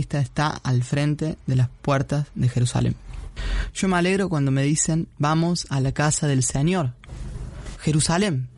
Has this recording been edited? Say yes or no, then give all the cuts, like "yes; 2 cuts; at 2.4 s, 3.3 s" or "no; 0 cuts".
no; 0 cuts